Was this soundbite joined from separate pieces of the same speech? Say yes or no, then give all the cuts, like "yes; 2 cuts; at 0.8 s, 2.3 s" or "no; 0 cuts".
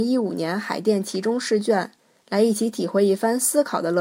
no; 0 cuts